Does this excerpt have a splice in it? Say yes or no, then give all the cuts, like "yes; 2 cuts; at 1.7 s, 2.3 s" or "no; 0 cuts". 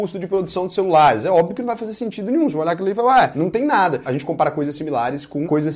no; 0 cuts